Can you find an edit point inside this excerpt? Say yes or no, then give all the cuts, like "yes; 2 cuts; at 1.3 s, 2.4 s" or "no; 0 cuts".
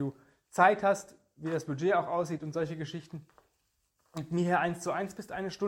no; 0 cuts